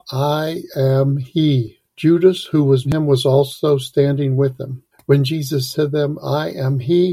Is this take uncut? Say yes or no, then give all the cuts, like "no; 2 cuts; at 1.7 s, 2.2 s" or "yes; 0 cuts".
no; 4 cuts; at 1.9 s, 2.8 s, 4.9 s, 5.7 s